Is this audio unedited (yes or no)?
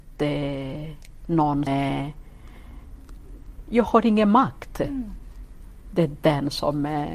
no